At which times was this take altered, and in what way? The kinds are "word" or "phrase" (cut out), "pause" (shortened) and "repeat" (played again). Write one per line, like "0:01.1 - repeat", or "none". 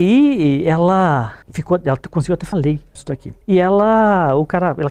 0:01.4 - pause
0:02.5 - word
0:03.0 - word
0:03.4 - pause